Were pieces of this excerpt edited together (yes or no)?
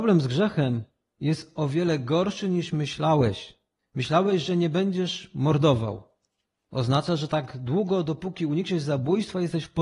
no